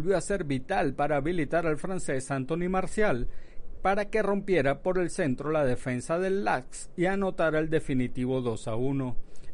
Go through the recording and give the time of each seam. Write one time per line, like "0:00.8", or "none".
none